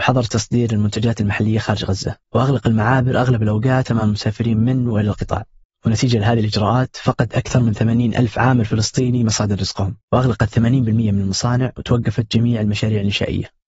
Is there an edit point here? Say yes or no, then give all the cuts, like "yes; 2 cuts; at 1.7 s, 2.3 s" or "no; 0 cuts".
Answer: yes; 3 cuts; at 2.2 s, 5.6 s, 10.0 s